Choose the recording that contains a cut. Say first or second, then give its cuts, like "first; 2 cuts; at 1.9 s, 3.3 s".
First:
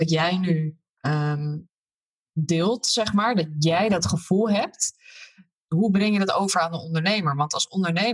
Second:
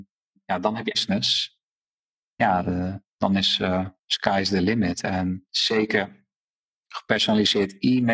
second; 2 cuts; at 0.9 s, 4.0 s